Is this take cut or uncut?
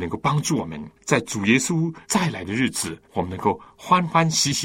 cut